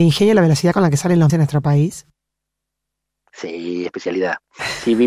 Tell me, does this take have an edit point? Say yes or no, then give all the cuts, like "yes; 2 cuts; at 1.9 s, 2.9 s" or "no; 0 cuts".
yes; 2 cuts; at 1.3 s, 3.9 s